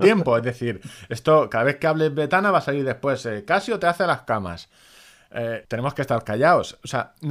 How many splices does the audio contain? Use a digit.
1